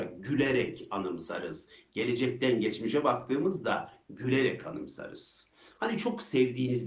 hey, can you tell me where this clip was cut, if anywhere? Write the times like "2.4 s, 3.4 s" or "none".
none